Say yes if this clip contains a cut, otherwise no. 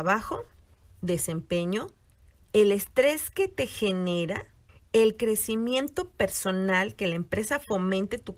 no